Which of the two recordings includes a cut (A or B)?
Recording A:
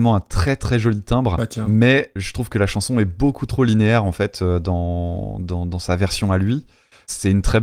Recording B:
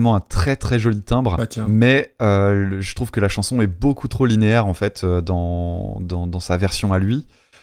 A